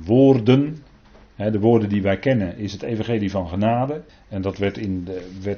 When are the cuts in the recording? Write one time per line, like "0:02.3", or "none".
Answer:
0:04.1